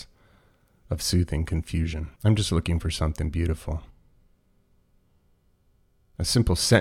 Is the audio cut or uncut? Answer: cut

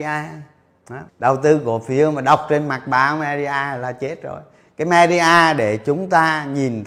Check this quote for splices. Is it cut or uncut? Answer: cut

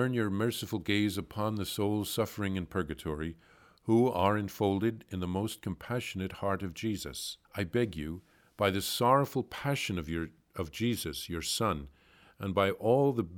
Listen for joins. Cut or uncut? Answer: cut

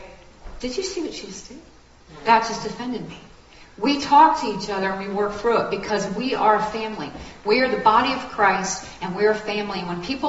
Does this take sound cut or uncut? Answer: uncut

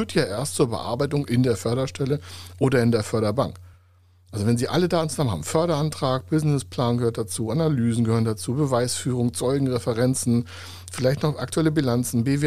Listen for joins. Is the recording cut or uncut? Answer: uncut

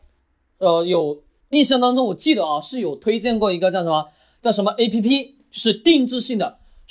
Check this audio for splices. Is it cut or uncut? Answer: uncut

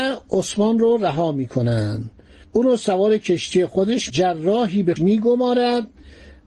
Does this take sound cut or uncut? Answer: cut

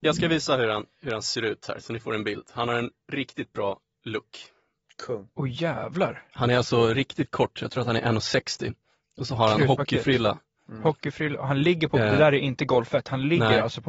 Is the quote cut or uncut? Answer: uncut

